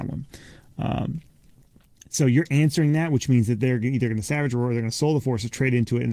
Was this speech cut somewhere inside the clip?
no; 0 cuts

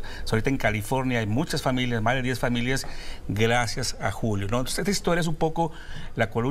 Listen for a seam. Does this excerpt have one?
no; 0 cuts

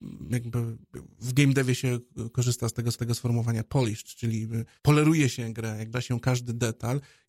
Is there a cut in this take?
yes; 3 cuts; at 2.9 s, 4.8 s, 5.9 s

